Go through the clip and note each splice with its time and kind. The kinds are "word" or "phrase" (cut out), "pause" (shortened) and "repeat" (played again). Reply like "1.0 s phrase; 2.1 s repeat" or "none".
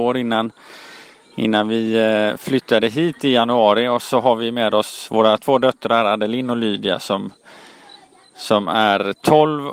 none